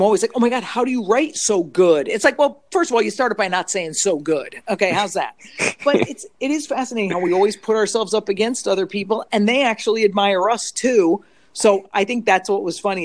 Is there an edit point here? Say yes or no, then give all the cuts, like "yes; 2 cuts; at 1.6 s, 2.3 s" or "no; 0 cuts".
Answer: no; 0 cuts